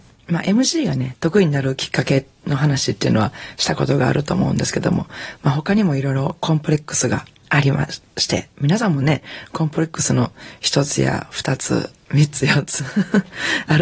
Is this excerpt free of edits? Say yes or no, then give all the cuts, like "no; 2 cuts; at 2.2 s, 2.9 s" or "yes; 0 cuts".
yes; 0 cuts